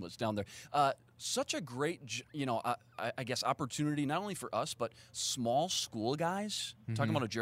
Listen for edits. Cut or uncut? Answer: uncut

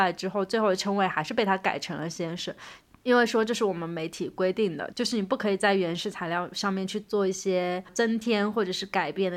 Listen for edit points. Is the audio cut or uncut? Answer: uncut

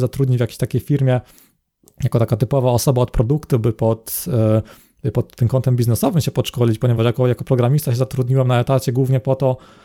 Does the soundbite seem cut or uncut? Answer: uncut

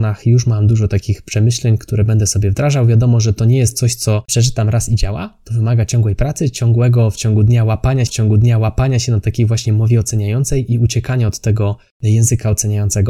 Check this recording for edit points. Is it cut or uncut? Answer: cut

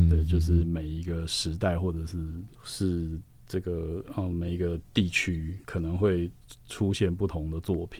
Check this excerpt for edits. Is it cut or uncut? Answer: cut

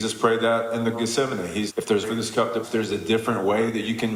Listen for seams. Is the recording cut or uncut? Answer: cut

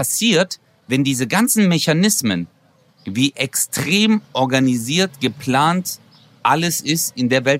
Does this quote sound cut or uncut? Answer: uncut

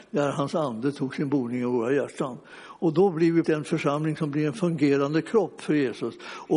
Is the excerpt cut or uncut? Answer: cut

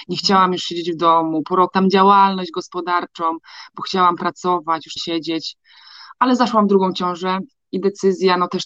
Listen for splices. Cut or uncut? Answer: cut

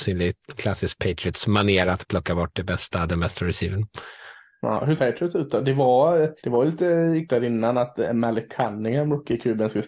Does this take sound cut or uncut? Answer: cut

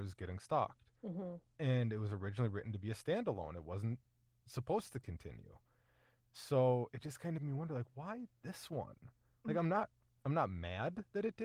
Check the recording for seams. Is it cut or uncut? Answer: cut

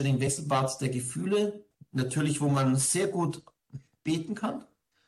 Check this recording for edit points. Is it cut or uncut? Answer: uncut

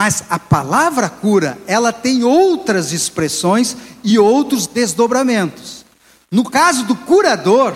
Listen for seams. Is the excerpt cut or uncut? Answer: uncut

